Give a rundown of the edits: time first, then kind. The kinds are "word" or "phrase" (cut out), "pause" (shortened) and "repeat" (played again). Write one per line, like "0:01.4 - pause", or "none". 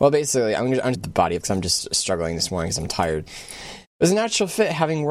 0:00.9 - phrase
0:01.4 - word
0:03.9 - pause